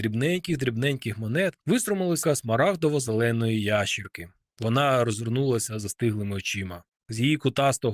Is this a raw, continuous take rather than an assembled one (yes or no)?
no